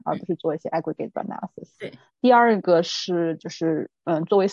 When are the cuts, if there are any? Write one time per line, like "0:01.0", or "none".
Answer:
0:01.1
0:02.1